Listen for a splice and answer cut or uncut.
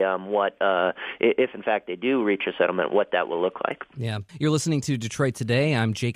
cut